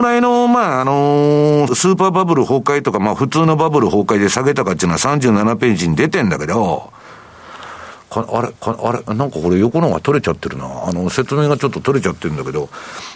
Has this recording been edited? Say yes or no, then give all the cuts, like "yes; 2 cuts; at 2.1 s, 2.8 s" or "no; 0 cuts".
yes; 2 cuts; at 1.7 s, 8.6 s